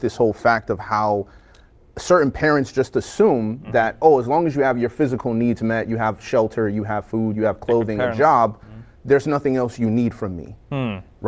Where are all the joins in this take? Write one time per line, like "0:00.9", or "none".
none